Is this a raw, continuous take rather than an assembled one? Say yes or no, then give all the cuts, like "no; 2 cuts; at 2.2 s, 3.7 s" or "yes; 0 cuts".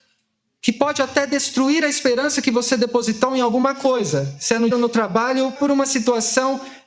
no; 2 cuts; at 4.7 s, 5.6 s